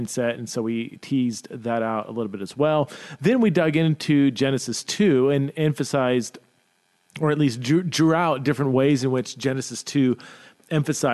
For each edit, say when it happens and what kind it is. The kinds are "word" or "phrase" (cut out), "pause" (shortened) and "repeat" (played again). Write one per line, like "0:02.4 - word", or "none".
none